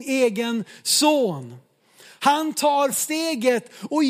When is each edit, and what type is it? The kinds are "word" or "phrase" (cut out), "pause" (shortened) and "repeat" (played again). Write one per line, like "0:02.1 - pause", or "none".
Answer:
0:02.9 - word

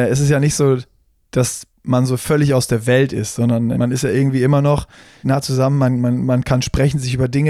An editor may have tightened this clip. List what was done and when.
0:01.7 - pause
0:03.7 - word
0:05.2 - word

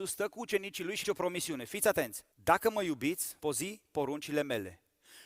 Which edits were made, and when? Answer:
0:01.0 - phrase
0:02.3 - pause
0:03.4 - word

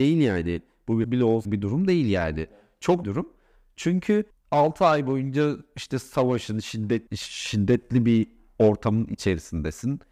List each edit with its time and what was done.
0:01.0 - word
0:01.5 - phrase
0:03.0 - phrase
0:04.3 - pause
0:07.1 - pause

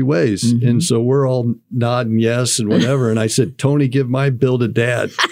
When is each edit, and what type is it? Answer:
none

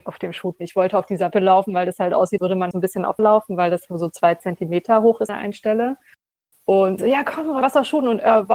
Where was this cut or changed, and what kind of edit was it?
0:01.3 - word
0:02.4 - word
0:02.7 - word
0:03.2 - word
0:03.9 - word
0:05.3 - word
0:07.0 - word
0:07.6 - word

